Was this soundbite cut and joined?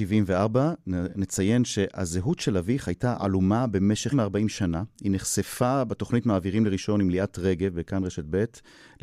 yes; 1 cut; at 4.1 s

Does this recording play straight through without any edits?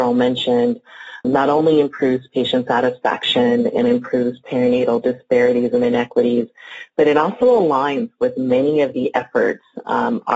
no; 1 cut; at 1.2 s

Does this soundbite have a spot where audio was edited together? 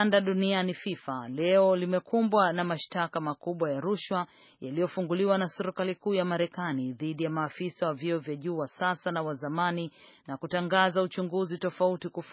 no; 0 cuts

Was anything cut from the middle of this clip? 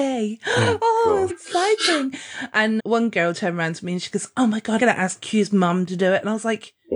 yes; 3 cuts; at 1.3 s, 2.8 s, 4.8 s

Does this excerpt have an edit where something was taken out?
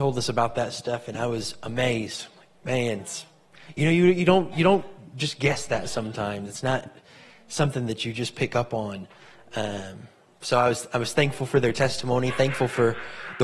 no; 0 cuts

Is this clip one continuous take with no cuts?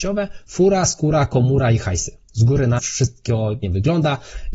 no; 2 cuts; at 2.8 s, 3.6 s

